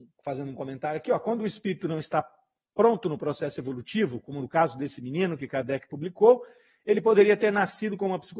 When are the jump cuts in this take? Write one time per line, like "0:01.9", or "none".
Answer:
none